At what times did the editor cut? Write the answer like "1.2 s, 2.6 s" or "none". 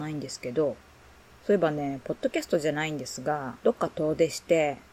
3.6 s